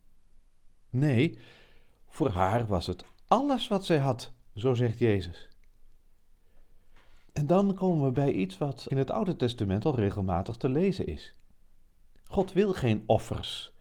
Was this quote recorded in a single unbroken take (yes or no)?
no